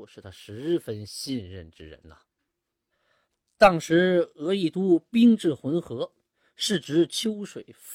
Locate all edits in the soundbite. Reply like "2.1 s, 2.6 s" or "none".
none